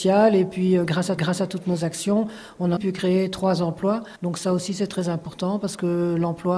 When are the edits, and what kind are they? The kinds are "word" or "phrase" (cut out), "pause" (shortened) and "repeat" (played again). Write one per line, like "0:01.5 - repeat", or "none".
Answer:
0:01.2 - repeat
0:02.8 - word
0:04.2 - pause